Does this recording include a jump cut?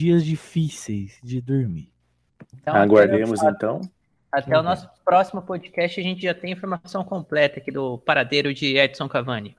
no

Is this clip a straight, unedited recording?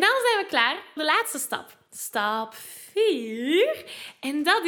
no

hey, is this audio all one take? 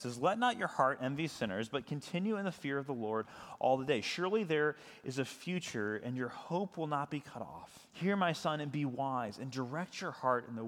no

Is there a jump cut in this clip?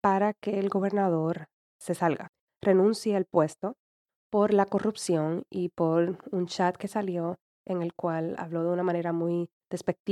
no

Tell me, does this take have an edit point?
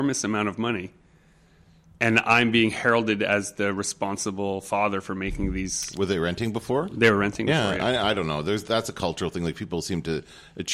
no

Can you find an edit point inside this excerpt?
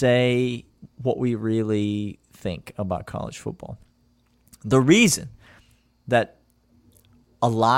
no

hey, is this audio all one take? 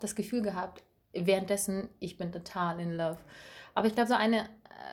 yes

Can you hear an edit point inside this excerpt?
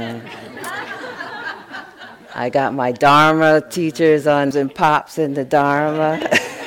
yes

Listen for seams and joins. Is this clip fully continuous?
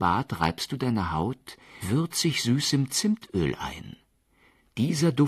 no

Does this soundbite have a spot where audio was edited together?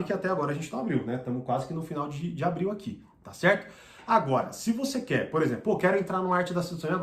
no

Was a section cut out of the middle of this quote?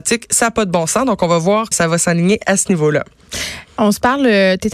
yes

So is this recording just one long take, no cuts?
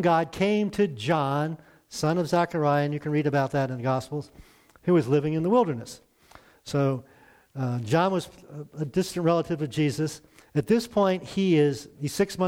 yes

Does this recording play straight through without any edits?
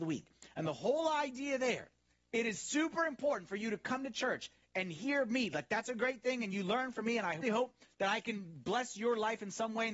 no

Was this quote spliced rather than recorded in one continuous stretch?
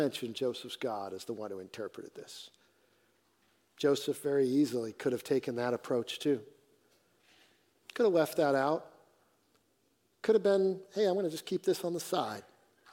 no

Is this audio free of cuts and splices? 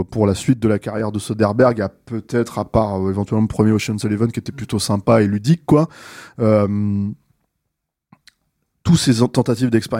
yes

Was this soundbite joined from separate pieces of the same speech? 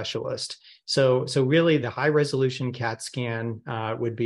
yes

